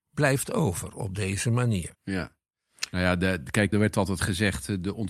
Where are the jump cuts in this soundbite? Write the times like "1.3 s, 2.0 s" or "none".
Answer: 1.9 s, 3.7 s